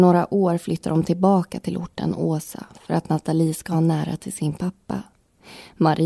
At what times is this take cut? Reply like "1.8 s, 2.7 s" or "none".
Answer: none